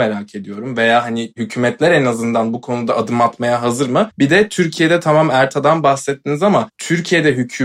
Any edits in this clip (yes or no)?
yes